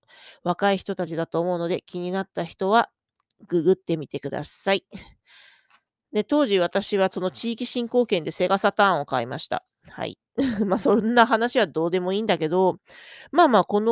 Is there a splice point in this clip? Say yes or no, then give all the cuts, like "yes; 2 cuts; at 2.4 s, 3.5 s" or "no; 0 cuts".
no; 0 cuts